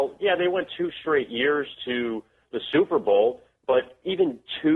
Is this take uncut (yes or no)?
yes